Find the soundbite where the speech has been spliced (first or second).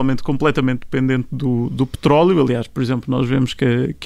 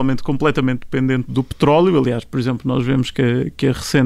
second